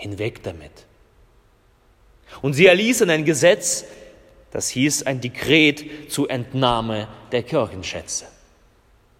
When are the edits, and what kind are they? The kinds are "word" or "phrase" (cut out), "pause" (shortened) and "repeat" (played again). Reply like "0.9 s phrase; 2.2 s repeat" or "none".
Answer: none